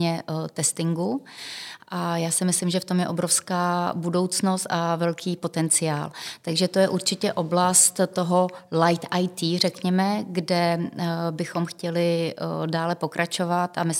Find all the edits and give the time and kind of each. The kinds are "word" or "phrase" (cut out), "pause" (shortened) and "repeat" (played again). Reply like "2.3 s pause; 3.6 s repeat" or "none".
none